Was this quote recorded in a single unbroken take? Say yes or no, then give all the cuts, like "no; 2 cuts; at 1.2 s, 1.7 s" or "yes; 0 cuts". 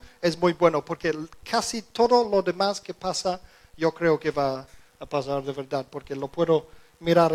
yes; 0 cuts